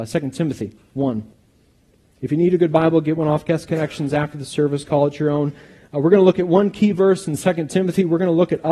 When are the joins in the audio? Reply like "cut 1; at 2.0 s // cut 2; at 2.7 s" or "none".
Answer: none